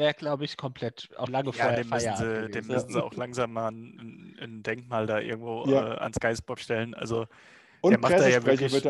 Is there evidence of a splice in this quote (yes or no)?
yes